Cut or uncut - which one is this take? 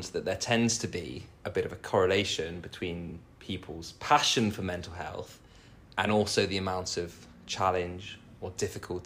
uncut